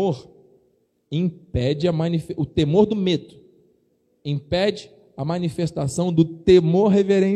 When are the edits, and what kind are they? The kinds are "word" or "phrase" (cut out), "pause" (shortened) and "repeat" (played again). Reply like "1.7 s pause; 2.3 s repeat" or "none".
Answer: none

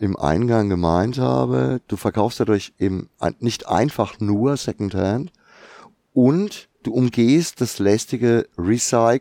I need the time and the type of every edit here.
6.7 s pause

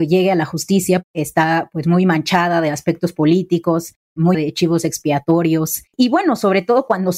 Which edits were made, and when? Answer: 4.3 s word; 5.9 s pause

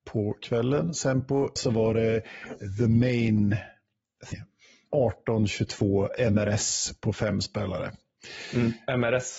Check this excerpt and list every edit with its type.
1.6 s word; 4.3 s word

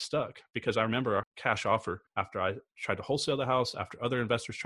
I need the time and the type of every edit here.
1.2 s word; 2.1 s pause

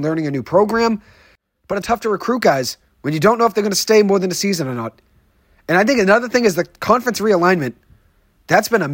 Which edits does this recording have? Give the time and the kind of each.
1.8 s word

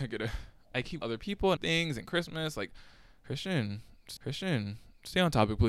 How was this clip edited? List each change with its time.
1.0 s phrase; 1.6 s word; 4.2 s repeat

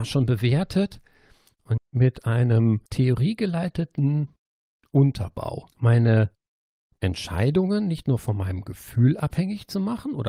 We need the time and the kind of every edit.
1.8 s phrase; 2.9 s pause; 5.7 s pause

